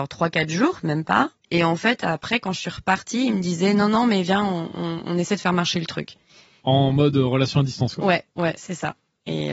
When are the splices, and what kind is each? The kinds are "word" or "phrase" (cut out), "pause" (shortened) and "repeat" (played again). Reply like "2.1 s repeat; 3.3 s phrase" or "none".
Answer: 1.4 s pause